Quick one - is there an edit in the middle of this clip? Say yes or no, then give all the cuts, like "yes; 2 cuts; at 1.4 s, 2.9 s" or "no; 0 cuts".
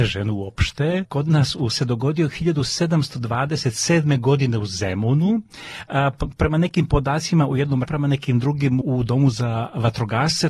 yes; 4 cuts; at 1.0 s, 1.7 s, 7.9 s, 8.8 s